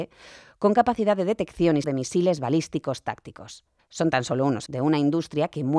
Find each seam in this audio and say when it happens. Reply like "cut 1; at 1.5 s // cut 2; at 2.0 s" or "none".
cut 1; at 1.8 s // cut 2; at 3.8 s // cut 3; at 4.7 s